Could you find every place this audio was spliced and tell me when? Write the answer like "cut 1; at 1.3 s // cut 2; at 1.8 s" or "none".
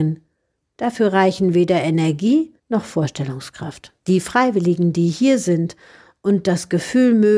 cut 1; at 2.6 s // cut 2; at 4.0 s